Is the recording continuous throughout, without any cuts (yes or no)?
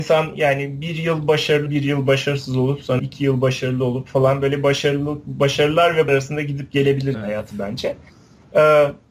no